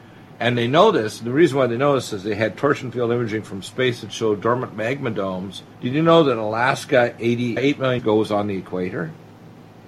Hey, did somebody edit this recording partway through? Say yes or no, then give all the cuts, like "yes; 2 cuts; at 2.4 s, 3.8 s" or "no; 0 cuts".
yes; 3 cuts; at 5.7 s, 7.6 s, 8.0 s